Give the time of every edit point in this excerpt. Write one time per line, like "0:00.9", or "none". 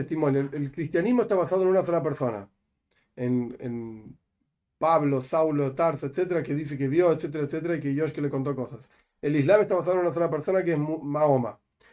none